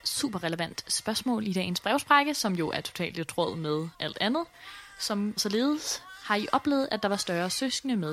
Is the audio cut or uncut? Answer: cut